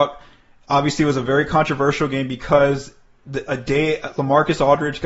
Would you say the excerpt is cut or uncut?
uncut